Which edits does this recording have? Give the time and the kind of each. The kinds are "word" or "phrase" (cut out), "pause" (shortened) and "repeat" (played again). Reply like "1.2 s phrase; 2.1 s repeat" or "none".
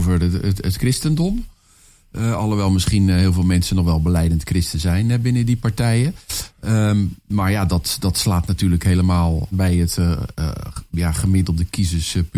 9.5 s phrase